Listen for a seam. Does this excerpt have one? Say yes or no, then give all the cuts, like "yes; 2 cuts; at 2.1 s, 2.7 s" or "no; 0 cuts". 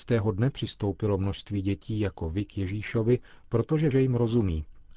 yes; 1 cut; at 3.9 s